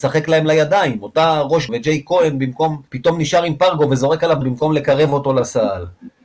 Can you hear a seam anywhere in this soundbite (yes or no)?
yes